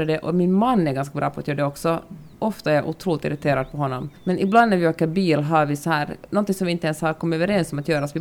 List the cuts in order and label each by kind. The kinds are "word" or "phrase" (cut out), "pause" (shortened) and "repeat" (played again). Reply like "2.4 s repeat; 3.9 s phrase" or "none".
2.3 s pause; 4.2 s pause